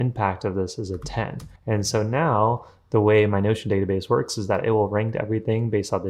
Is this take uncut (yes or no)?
no